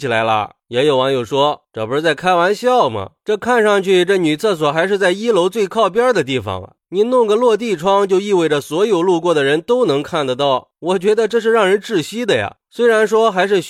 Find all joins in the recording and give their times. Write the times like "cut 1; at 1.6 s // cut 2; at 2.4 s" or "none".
none